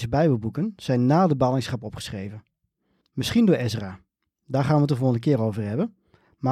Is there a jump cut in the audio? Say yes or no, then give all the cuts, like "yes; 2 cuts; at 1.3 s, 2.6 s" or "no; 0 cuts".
no; 0 cuts